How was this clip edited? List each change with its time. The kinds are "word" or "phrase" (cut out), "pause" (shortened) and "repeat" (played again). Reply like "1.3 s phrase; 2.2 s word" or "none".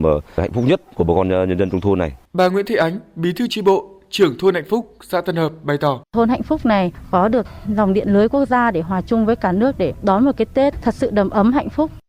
2.3 s pause; 6.0 s pause